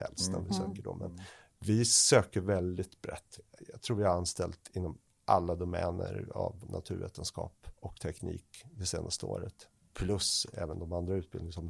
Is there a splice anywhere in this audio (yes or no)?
no